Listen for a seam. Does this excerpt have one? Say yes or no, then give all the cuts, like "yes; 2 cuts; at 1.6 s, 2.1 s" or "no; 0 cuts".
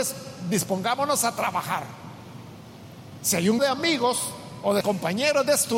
yes; 2 cuts; at 3.6 s, 4.8 s